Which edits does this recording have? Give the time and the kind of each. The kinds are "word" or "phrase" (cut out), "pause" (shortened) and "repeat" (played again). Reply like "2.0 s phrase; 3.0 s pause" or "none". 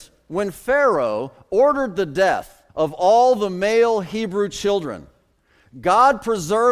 2.7 s pause